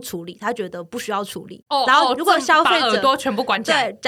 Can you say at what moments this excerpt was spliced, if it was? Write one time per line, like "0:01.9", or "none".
none